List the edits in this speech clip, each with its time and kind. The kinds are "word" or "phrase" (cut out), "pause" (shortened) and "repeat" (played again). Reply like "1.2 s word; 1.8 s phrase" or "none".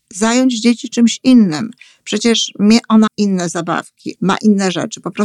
3.1 s word; 4.2 s word